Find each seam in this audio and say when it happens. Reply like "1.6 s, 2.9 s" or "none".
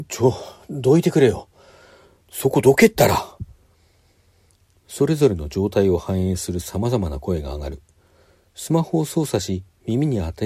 none